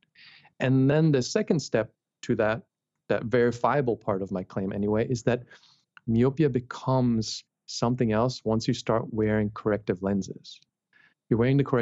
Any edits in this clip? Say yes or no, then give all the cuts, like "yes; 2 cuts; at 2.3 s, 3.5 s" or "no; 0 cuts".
no; 0 cuts